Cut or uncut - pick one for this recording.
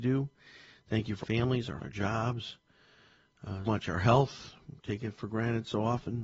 cut